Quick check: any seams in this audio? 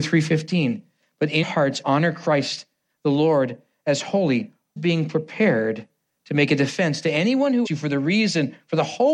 yes; 3 cuts; at 1.4 s, 4.8 s, 7.6 s

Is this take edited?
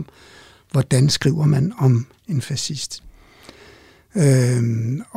no; 0 cuts

